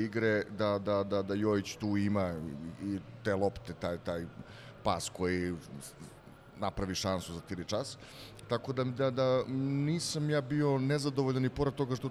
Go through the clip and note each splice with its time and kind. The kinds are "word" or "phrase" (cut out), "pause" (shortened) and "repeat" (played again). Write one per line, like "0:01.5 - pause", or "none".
none

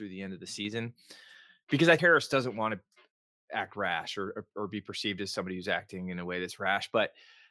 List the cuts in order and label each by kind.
0:02.0 - word
0:04.5 - word

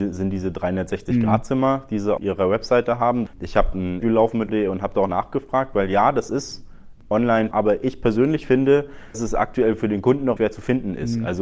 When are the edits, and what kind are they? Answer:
0:02.2 - word
0:03.7 - word
0:04.0 - word
0:04.5 - word
0:05.1 - word
0:07.5 - word
0:09.1 - word
0:10.4 - word

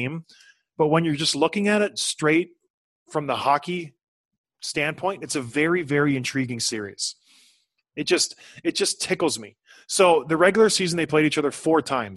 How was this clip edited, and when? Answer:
none

